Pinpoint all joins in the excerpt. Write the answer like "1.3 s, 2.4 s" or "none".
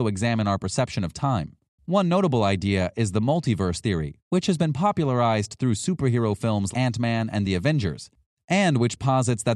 1.7 s, 6.7 s